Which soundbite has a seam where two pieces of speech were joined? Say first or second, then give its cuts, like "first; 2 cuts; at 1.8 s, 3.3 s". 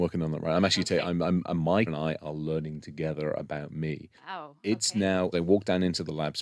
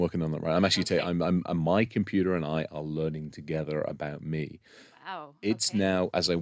first; 3 cuts; at 1.9 s, 4.2 s, 5.3 s